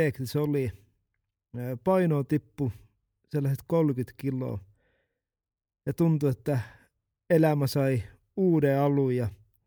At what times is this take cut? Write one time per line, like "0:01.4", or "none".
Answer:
none